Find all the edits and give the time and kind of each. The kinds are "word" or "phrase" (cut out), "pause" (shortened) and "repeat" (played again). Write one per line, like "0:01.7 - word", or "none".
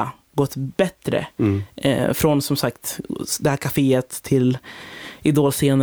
none